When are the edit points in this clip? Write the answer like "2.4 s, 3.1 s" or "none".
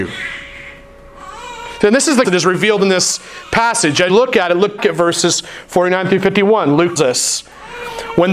2.2 s, 4.1 s, 4.8 s, 7.0 s